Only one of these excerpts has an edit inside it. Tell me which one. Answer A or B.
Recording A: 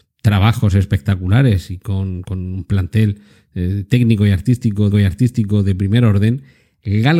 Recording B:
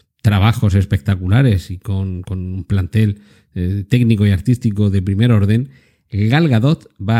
A